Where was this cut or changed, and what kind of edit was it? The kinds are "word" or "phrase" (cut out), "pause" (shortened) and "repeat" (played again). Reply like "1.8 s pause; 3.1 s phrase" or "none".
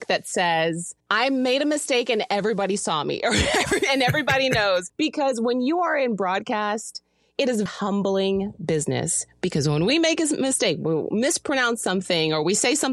1.0 s pause; 7.7 s word